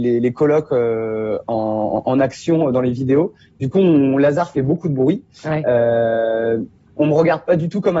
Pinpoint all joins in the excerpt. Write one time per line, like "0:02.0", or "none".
none